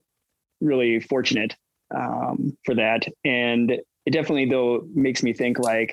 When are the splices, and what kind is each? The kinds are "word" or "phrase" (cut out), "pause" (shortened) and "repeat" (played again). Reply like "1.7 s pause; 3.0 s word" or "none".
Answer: 2.6 s pause